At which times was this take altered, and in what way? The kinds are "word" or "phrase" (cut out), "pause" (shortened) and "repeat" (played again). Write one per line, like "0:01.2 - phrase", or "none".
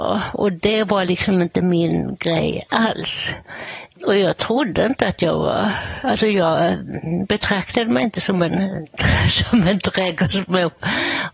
none

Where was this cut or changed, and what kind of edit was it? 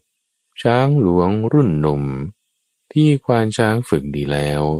none

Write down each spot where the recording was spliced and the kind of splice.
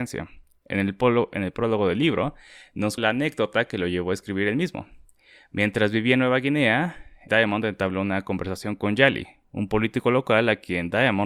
0:03.0 - word
0:07.3 - word

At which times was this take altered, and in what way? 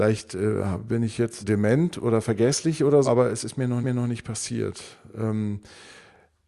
0:01.4 - word
0:03.0 - word
0:03.8 - repeat

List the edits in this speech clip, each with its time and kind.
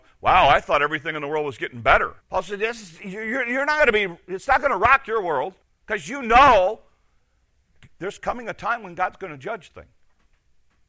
0:02.2 - pause
0:05.6 - pause
0:09.7 - word

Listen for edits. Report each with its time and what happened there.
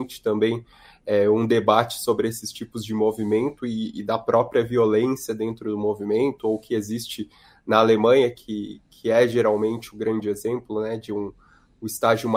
none

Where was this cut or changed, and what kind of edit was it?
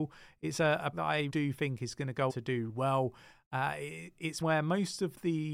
0:00.9 - word
0:01.3 - word
0:02.3 - word
0:02.7 - word
0:04.4 - word

